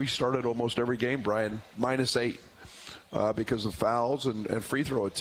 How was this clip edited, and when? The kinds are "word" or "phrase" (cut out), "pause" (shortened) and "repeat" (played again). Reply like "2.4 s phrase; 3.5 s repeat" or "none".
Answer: none